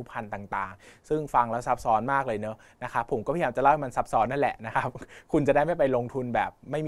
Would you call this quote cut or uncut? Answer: uncut